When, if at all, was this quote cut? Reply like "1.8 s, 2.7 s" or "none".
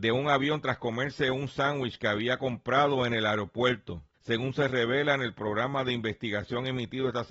4.1 s